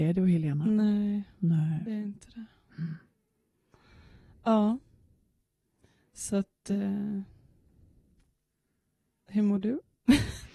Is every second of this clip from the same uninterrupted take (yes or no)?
yes